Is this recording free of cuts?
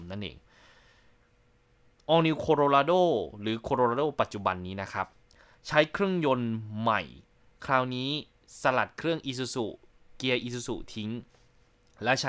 yes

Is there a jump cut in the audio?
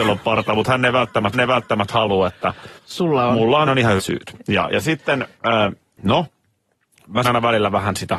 yes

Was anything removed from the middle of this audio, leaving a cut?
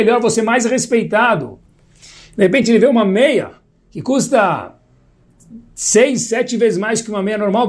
no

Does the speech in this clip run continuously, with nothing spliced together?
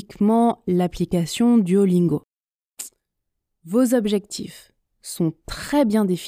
yes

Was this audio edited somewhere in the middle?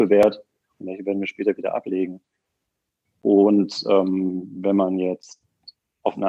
no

